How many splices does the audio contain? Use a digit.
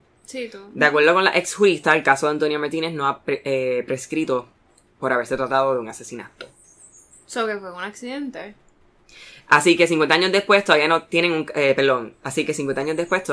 0